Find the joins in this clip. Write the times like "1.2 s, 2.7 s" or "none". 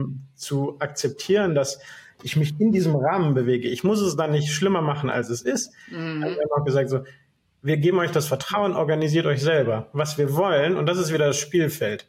7.4 s